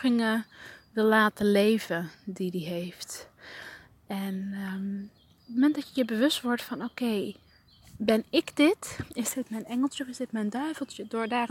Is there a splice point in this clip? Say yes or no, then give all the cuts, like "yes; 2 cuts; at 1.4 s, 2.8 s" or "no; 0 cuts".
no; 0 cuts